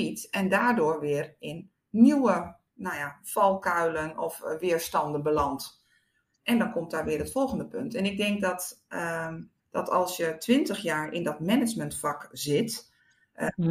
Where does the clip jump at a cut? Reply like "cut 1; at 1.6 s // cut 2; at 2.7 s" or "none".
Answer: cut 1; at 1.8 s // cut 2; at 9.6 s